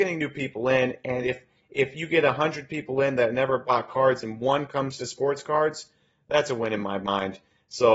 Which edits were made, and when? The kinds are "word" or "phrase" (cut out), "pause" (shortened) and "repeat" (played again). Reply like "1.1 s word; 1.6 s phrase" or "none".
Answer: none